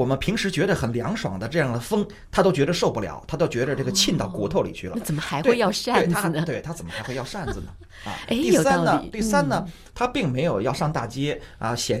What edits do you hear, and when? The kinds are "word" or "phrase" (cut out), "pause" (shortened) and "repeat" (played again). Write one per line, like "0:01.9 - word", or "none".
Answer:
none

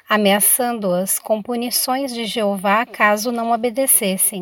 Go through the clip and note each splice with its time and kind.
none

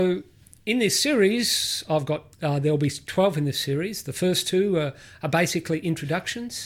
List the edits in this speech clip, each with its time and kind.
0:02.3 - pause

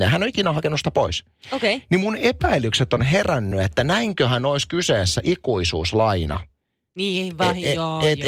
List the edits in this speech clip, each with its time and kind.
none

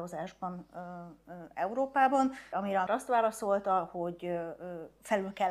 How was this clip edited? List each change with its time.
0:02.5 - word
0:02.9 - word

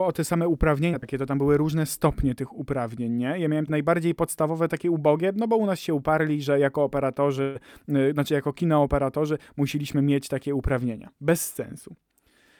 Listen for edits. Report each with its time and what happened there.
0:03.7 - word

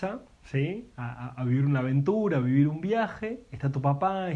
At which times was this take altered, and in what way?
none

